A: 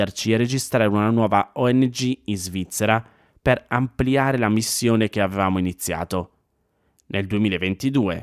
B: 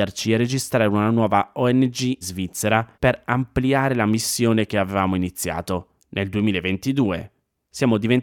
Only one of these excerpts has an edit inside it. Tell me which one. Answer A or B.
B